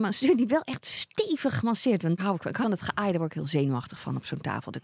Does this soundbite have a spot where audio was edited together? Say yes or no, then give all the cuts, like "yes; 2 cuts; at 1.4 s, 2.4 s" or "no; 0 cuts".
yes; 2 cuts; at 2.2 s, 2.6 s